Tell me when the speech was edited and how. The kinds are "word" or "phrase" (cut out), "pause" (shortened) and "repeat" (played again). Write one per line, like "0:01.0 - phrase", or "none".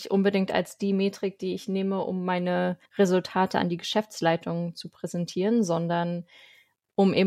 0:02.8 - pause